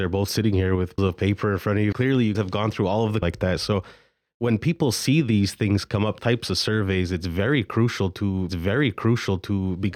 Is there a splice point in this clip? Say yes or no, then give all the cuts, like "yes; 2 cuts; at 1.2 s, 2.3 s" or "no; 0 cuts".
yes; 6 cuts; at 1.0 s, 1.9 s, 2.3 s, 3.2 s, 6.2 s, 8.5 s